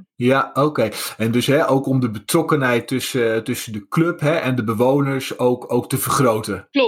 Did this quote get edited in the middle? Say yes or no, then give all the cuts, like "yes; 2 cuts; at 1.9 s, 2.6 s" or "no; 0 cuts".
no; 0 cuts